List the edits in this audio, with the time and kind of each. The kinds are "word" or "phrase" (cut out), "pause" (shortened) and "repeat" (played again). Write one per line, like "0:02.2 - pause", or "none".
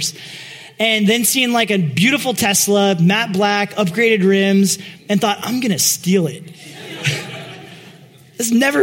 none